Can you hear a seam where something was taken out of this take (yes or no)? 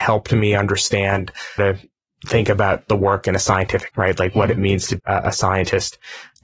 yes